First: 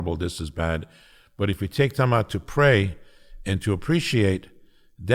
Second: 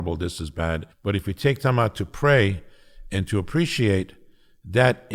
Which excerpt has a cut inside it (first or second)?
second